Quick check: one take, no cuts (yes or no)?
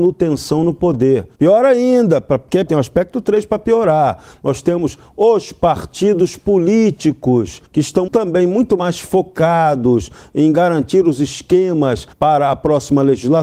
no